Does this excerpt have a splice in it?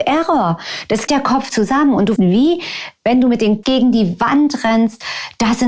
yes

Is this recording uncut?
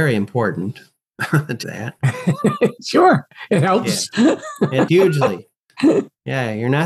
no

